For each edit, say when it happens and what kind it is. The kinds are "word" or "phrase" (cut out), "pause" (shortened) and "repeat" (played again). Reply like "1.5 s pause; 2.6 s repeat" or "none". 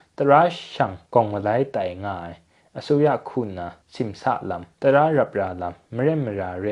1.1 s pause; 3.8 s pause; 4.7 s pause